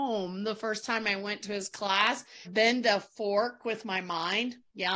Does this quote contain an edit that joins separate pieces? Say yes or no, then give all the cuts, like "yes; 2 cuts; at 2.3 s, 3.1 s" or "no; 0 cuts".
yes; 1 cut; at 2.4 s